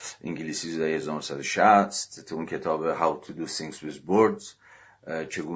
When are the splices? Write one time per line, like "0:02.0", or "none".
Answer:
none